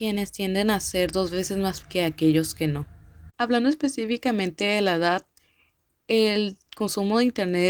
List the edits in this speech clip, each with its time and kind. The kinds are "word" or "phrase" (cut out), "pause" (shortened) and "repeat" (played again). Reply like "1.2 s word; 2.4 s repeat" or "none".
1.8 s phrase; 3.3 s pause